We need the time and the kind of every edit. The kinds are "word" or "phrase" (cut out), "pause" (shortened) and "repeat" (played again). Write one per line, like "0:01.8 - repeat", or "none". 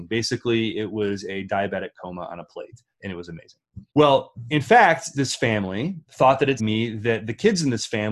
0:02.9 - pause
0:03.9 - pause
0:05.1 - word
0:06.6 - phrase